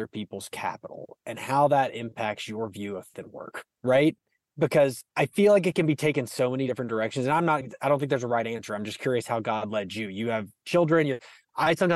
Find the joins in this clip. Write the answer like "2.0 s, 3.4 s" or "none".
3.1 s, 3.7 s, 5.1 s